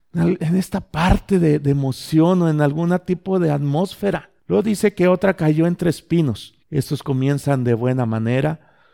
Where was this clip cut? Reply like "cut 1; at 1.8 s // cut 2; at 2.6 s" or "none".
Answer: cut 1; at 4.4 s // cut 2; at 6.6 s